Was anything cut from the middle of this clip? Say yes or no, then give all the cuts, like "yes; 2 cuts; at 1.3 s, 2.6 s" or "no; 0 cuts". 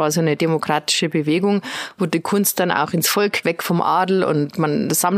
yes; 1 cut; at 3.4 s